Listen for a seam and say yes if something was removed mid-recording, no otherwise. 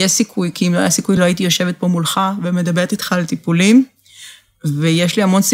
no